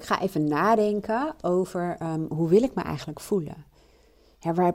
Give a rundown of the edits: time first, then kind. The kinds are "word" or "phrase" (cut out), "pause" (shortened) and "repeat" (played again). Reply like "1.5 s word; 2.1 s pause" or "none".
none